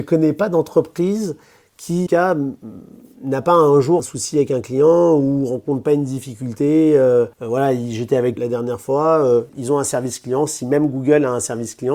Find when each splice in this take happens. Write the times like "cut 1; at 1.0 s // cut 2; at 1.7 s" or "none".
cut 1; at 2.1 s // cut 2; at 4.0 s // cut 3; at 7.3 s // cut 4; at 8.4 s // cut 5; at 9.5 s